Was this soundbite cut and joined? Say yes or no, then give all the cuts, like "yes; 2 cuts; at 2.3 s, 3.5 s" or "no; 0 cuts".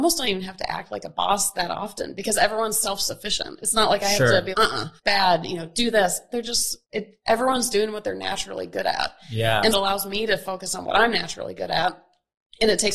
yes; 4 cuts; at 4.5 s, 5.0 s, 6.8 s, 9.7 s